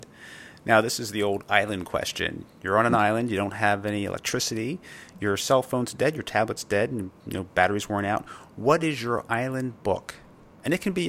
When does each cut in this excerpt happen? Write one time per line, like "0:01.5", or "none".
none